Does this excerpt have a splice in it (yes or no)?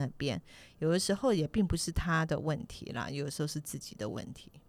no